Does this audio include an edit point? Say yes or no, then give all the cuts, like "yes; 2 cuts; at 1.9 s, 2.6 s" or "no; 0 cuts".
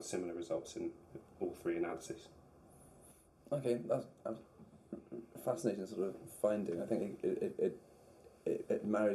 no; 0 cuts